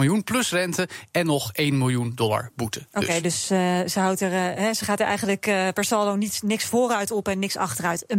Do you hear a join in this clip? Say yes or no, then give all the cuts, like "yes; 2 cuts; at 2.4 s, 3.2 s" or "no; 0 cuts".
no; 0 cuts